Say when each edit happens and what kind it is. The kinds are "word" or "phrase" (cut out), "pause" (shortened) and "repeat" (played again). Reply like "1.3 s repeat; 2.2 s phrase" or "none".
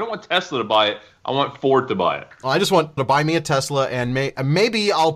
3.0 s word